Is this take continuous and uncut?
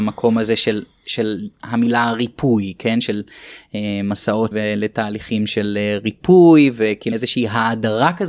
no; 2 cuts; at 4.5 s, 7.1 s

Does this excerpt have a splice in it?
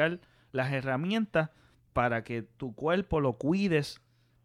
no; 0 cuts

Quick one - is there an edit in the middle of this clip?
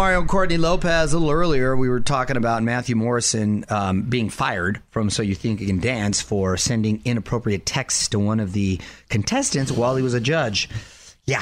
no; 0 cuts

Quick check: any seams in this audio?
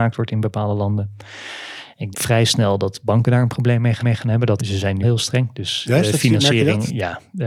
yes; 4 cuts; at 2.1 s, 4.0 s, 4.6 s, 5.0 s

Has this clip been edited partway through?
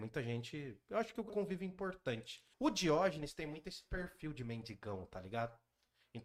yes; 2 cuts; at 1.3 s, 2.5 s

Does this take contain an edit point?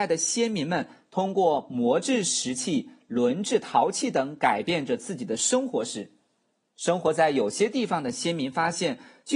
no; 0 cuts

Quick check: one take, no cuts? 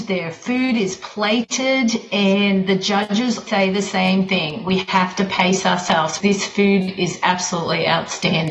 no; 2 cuts; at 3.5 s, 6.2 s

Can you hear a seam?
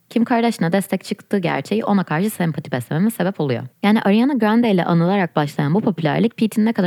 no; 0 cuts

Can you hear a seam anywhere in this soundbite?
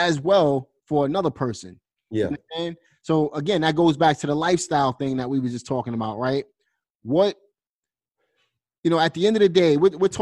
no; 0 cuts

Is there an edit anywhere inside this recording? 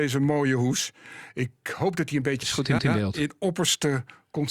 yes; 2 cuts; at 2.4 s, 2.8 s

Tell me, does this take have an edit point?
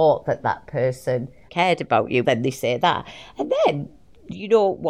yes; 2 cuts; at 1.5 s, 2.2 s

